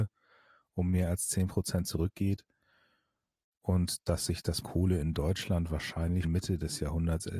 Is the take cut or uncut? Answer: cut